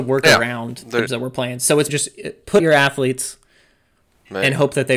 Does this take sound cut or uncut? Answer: cut